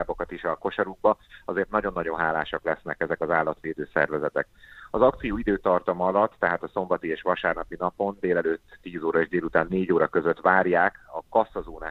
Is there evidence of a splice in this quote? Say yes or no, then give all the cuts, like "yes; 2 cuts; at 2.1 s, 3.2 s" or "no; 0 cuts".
no; 0 cuts